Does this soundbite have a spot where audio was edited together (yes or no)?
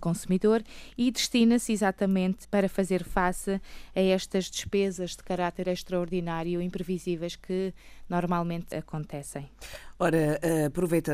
yes